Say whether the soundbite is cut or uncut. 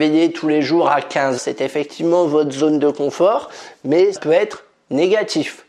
cut